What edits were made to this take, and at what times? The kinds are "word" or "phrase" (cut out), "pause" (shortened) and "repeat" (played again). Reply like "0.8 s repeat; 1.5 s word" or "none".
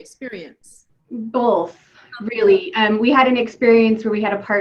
none